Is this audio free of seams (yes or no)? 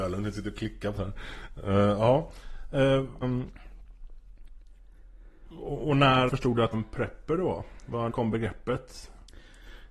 no